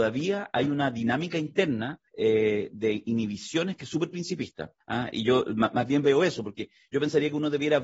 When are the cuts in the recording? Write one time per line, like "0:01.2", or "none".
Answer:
0:02.1
0:04.8